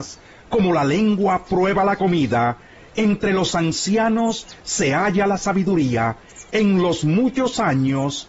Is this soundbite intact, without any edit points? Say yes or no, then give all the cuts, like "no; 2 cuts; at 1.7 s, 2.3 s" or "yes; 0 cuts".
yes; 0 cuts